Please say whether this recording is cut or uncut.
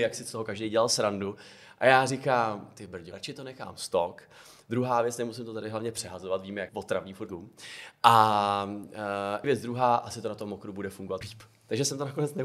cut